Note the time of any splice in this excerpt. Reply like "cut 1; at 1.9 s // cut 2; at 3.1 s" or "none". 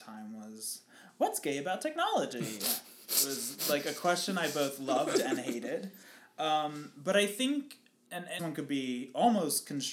cut 1; at 8.4 s

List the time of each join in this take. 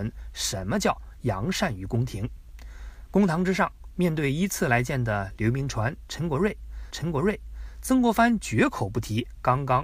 cut 1; at 6.9 s

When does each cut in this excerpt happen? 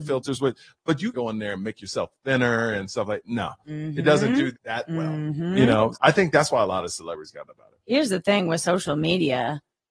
cut 1; at 1.1 s // cut 2; at 4.5 s // cut 3; at 5.9 s // cut 4; at 7.5 s

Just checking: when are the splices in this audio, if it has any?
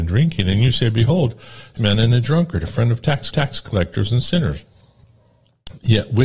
cut 1; at 1.8 s // cut 2; at 3.3 s

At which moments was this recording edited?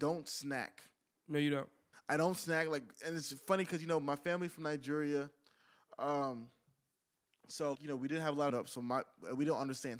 cut 1; at 1.9 s // cut 2; at 7.7 s // cut 3; at 8.5 s

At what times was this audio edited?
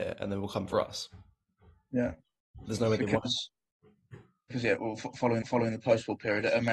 cut 1; at 5.4 s

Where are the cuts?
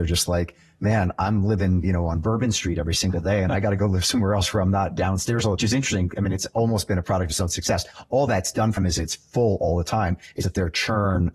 cut 1; at 5.6 s // cut 2; at 8.8 s // cut 3; at 10.4 s

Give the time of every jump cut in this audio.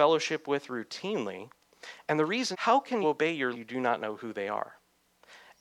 cut 1; at 2.5 s // cut 2; at 3.0 s // cut 3; at 3.5 s

